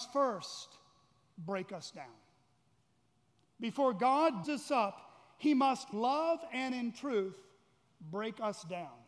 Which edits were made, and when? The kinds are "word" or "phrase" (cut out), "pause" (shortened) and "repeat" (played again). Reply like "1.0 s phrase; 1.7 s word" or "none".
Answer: 4.4 s word; 5.9 s word